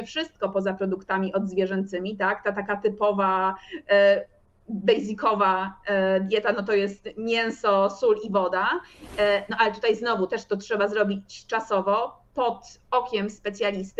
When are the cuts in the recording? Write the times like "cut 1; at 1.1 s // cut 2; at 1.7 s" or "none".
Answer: none